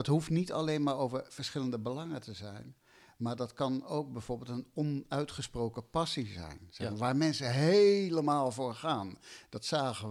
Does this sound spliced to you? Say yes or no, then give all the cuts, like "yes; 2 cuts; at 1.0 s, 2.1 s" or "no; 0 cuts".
no; 0 cuts